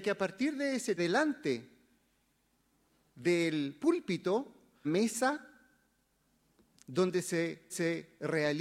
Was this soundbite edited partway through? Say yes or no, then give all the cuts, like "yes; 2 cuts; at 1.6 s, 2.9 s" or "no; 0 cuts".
yes; 3 cuts; at 1.0 s, 4.8 s, 7.7 s